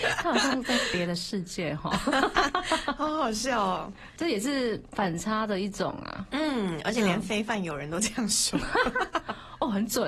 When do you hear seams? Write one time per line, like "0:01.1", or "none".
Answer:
none